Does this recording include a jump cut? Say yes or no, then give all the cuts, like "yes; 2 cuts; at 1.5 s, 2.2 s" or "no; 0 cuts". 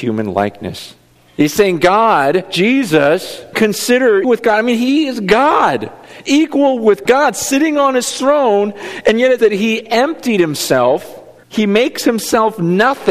yes; 4 cuts; at 3.5 s, 4.2 s, 7.0 s, 9.4 s